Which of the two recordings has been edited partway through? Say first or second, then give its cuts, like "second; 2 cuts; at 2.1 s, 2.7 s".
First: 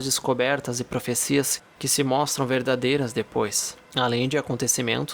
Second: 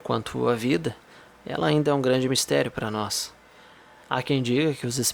first; 1 cut; at 3.8 s